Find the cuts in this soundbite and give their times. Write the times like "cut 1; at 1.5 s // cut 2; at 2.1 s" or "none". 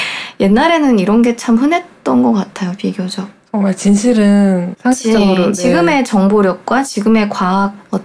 cut 1; at 4.7 s